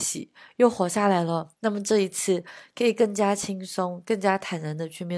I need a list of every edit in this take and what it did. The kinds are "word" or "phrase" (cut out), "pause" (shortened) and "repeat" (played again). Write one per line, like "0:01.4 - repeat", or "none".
0:01.5 - pause